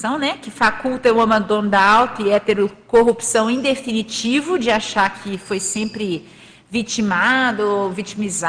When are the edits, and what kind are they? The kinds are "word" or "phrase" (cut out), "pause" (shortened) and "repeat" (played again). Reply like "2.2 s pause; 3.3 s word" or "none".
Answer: none

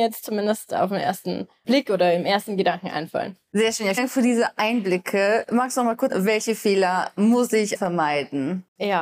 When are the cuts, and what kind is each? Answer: 4.0 s word; 6.1 s word; 7.7 s word

